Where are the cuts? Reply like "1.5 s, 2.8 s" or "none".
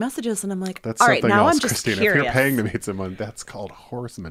none